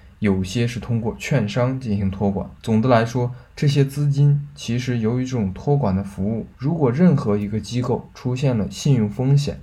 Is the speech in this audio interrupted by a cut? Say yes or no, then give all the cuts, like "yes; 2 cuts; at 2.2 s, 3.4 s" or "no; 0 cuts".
yes; 2 cuts; at 2.6 s, 6.5 s